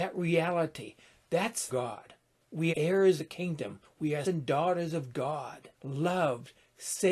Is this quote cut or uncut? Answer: cut